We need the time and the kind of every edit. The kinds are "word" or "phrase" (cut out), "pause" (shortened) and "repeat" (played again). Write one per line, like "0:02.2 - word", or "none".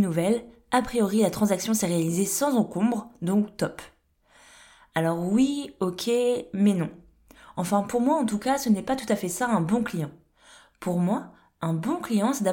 none